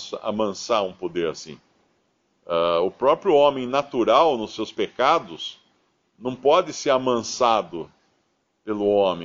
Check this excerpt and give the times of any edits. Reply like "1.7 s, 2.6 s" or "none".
none